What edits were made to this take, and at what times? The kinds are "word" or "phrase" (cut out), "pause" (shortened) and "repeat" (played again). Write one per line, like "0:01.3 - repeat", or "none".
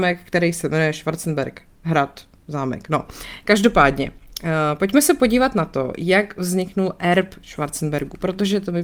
none